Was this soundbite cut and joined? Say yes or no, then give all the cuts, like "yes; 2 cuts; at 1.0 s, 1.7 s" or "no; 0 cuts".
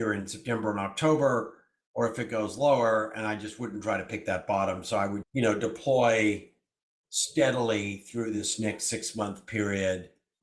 yes; 1 cut; at 5.2 s